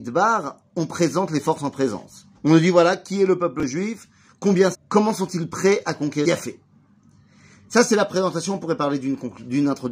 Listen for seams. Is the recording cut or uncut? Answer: cut